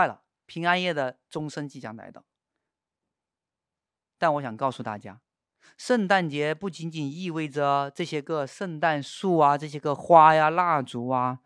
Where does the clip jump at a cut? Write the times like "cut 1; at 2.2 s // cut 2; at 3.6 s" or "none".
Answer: none